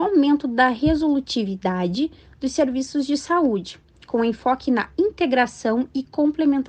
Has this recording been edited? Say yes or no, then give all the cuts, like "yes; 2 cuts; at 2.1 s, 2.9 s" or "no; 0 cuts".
no; 0 cuts